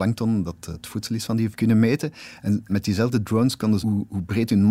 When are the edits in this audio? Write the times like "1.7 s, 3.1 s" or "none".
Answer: 1.5 s, 2.7 s, 3.8 s